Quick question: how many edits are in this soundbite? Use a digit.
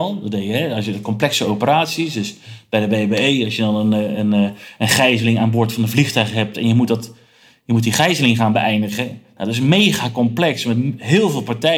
0